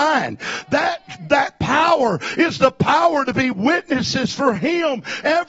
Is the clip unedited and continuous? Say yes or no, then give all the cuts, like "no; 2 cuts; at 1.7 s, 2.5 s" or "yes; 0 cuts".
yes; 0 cuts